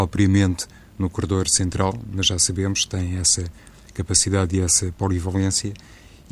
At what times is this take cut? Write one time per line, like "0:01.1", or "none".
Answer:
none